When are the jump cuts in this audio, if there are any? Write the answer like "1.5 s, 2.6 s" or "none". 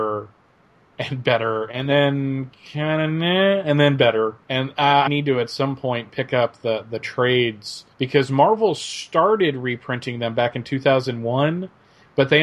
4.4 s, 5.1 s, 7.9 s